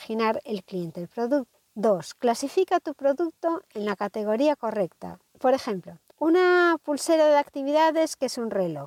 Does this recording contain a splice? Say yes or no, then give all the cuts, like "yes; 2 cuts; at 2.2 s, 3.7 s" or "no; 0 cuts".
no; 0 cuts